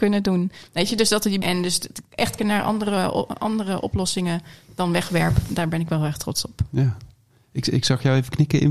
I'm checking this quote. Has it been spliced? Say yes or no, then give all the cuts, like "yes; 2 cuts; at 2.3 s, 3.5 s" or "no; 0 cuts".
yes; 2 cuts; at 1.4 s, 2.4 s